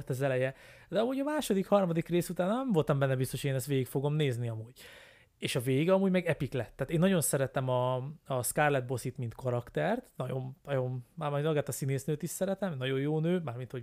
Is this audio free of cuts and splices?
yes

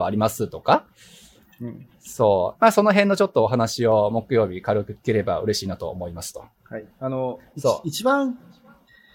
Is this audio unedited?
no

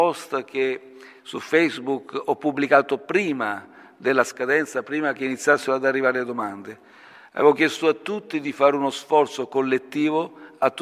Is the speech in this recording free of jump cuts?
yes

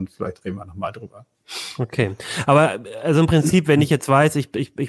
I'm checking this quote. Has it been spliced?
no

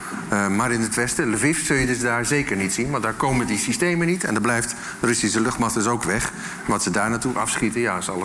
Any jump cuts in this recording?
no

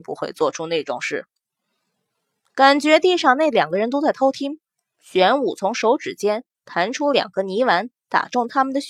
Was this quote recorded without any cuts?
yes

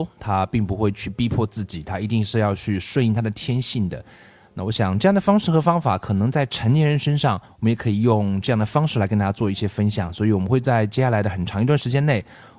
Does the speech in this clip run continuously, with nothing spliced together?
no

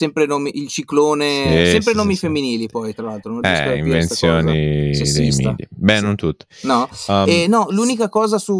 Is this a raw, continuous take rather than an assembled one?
yes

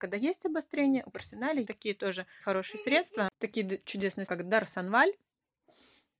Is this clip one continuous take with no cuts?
no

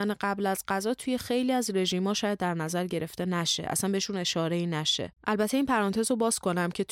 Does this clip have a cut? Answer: yes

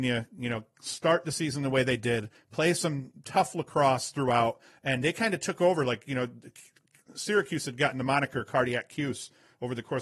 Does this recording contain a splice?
no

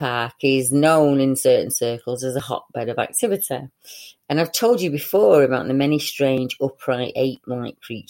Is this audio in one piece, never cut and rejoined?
yes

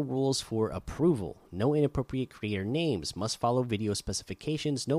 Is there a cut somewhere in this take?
no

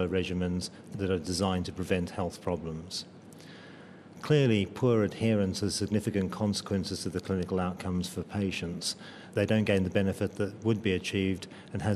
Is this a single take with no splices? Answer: yes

